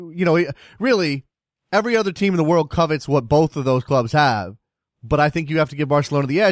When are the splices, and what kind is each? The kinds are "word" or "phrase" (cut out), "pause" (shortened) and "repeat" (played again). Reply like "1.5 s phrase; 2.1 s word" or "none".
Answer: none